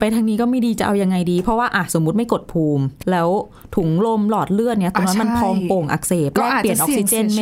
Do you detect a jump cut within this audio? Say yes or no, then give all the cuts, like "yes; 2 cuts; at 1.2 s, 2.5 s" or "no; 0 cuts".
yes; 1 cut; at 3.0 s